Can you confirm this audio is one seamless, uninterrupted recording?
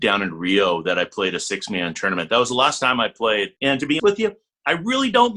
no; 2 cuts; at 3.6 s, 4.0 s

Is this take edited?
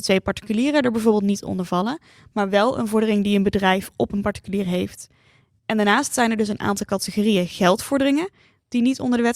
no; 0 cuts

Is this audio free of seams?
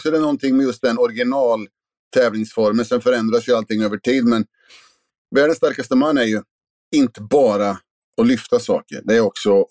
yes; 0 cuts

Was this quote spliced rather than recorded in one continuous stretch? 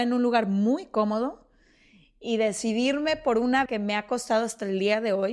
yes; 1 cut; at 3.7 s

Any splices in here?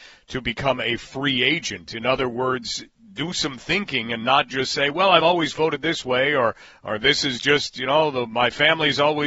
no; 0 cuts

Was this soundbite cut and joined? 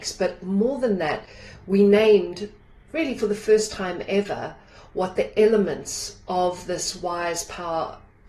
no; 0 cuts

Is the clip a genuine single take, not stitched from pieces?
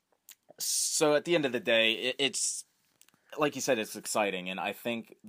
yes; 0 cuts

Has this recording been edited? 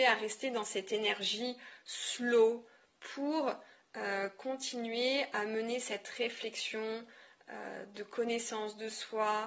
no; 0 cuts

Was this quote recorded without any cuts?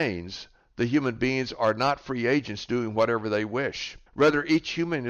no; 1 cut; at 4.1 s

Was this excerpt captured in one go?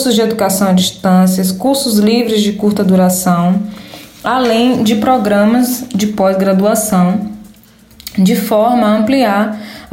yes; 0 cuts

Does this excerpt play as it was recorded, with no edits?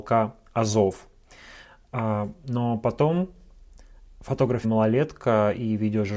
no; 1 cut; at 4.6 s

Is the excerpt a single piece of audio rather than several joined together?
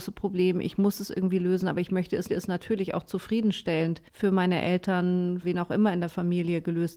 no; 3 cuts; at 2.3 s, 4.1 s, 5.4 s

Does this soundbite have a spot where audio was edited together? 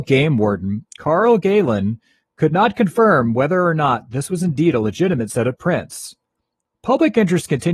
no; 0 cuts

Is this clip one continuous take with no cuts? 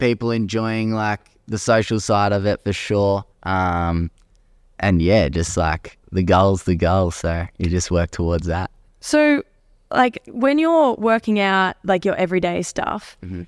no; 2 cuts; at 3.3 s, 6.0 s

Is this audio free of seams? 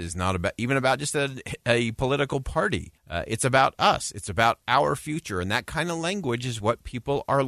no; 1 cut; at 3.0 s

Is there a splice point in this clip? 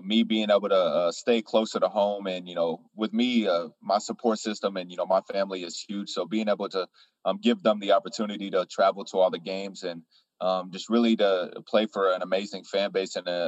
yes; 1 cut; at 2.9 s

